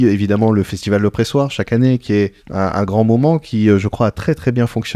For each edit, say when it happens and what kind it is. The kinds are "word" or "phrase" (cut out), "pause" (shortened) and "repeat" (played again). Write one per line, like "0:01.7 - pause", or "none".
0:02.4 - pause